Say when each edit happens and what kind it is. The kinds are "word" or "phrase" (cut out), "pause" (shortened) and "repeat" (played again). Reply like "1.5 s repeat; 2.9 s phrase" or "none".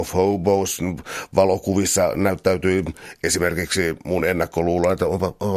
none